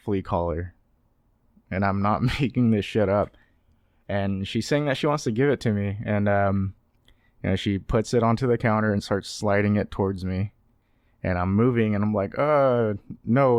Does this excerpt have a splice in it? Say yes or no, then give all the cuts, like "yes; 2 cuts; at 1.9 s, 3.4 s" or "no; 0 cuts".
no; 0 cuts